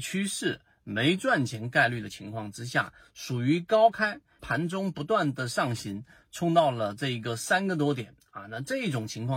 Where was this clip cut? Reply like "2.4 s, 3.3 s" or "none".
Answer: 4.4 s